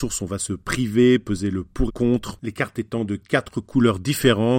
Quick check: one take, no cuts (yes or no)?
no